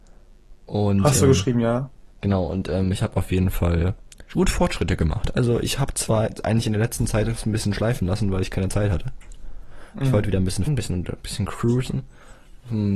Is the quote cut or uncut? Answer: cut